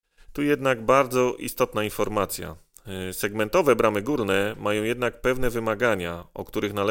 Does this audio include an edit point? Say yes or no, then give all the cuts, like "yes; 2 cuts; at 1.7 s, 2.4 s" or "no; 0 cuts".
no; 0 cuts